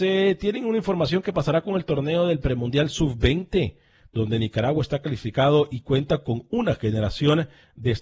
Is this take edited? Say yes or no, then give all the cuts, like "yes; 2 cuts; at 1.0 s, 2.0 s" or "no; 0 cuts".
no; 0 cuts